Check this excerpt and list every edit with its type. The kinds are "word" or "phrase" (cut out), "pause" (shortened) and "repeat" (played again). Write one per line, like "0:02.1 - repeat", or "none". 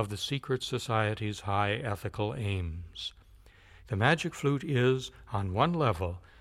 none